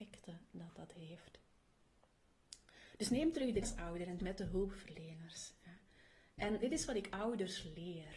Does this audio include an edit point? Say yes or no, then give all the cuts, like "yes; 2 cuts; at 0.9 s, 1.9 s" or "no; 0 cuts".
yes; 3 cuts; at 3.6 s, 4.2 s, 6.6 s